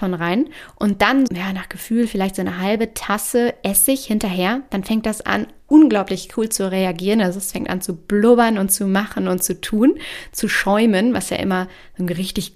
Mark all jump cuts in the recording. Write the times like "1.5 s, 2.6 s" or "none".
1.3 s